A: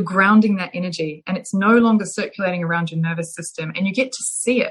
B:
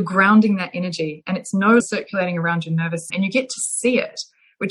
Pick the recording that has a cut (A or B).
B